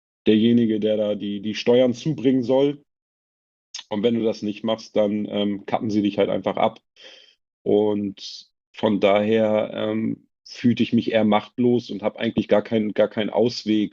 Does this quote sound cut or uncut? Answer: uncut